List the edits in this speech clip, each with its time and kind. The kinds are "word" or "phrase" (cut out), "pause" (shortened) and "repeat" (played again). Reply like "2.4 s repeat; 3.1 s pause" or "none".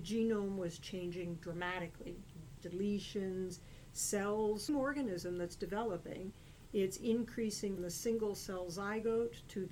2.6 s word; 4.7 s phrase; 7.8 s word